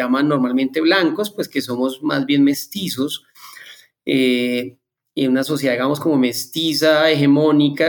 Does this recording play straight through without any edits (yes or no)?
yes